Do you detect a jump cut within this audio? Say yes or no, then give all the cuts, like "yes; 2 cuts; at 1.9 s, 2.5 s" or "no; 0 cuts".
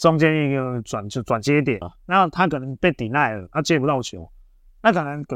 yes; 1 cut; at 1.8 s